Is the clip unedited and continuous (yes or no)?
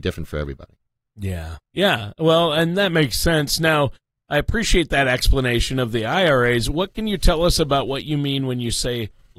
no